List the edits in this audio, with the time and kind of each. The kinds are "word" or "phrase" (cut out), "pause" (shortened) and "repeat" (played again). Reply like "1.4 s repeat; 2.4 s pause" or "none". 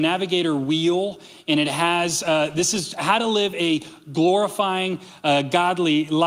none